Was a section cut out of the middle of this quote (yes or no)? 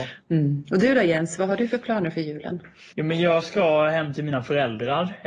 yes